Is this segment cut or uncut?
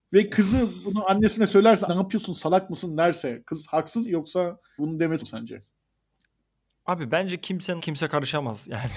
cut